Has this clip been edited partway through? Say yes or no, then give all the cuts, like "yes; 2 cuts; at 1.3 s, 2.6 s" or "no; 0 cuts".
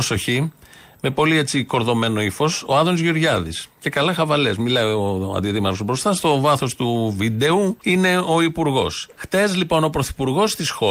yes; 2 cuts; at 7.8 s, 9.1 s